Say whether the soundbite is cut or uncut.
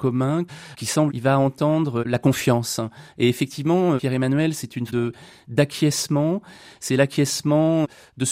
cut